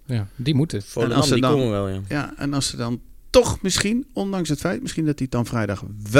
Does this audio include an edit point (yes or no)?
no